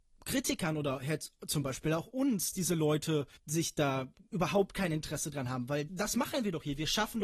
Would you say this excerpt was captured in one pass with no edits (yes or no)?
no